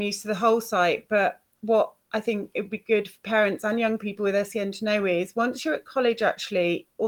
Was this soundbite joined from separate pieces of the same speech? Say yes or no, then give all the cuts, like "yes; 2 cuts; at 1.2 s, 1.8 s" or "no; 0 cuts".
no; 0 cuts